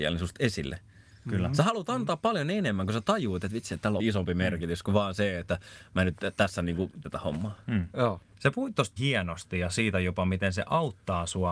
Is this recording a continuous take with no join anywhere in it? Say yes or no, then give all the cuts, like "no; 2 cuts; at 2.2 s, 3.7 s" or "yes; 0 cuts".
no; 3 cuts; at 4.0 s, 7.0 s, 9.0 s